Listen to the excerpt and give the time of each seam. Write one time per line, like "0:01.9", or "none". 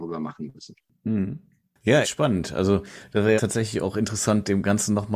0:02.0
0:03.4